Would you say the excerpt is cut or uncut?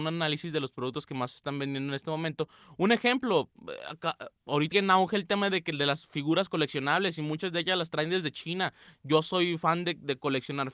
cut